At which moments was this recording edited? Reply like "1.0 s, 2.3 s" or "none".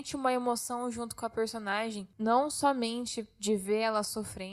none